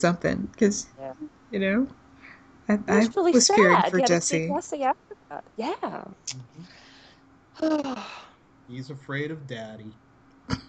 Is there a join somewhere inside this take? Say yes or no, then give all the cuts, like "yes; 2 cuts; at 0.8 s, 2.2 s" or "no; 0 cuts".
no; 0 cuts